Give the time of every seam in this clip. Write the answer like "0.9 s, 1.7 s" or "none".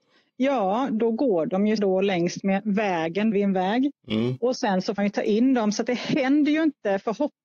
1.8 s, 3.3 s, 4.0 s, 5.0 s